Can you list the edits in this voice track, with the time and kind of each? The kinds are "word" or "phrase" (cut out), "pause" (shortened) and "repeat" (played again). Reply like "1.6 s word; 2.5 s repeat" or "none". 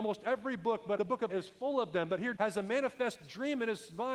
1.0 s word; 1.3 s word; 2.4 s word